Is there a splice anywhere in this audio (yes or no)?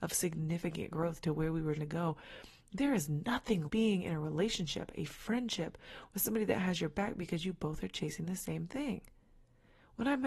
yes